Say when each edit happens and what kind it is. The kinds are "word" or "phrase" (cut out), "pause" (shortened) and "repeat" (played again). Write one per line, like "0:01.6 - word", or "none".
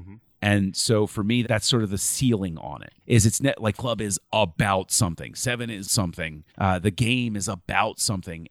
0:01.4 - word
0:03.0 - pause
0:03.8 - word
0:05.8 - word
0:06.5 - pause

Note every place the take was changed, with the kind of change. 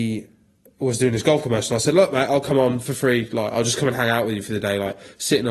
none

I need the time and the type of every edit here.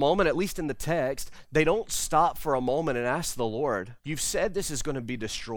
0:04.0 - pause

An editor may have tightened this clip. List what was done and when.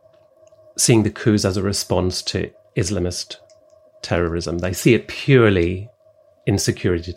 none

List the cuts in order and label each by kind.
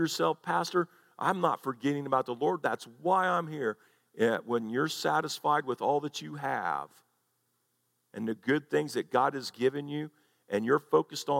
none

